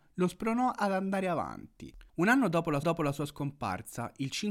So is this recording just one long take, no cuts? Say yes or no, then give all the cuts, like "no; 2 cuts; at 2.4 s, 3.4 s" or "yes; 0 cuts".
no; 2 cuts; at 2.1 s, 2.8 s